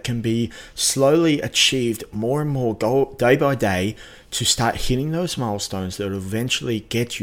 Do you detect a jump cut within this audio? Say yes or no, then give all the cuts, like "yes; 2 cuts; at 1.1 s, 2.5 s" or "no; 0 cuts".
no; 0 cuts